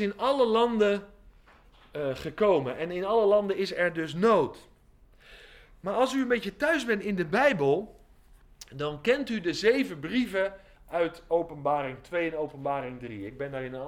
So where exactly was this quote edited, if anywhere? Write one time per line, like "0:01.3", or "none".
none